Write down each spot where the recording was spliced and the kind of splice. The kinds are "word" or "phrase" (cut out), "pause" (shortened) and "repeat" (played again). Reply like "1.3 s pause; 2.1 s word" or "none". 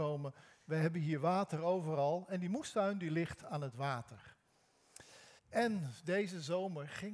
5.4 s pause